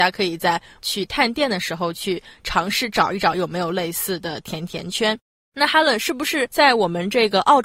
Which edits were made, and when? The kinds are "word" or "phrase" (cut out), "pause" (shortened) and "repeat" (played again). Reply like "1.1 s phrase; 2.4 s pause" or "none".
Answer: none